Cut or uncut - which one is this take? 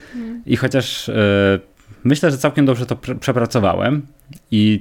uncut